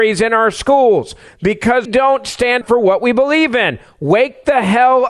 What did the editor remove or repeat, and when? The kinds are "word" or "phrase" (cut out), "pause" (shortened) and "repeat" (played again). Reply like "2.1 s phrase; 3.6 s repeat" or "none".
1.9 s word; 2.6 s word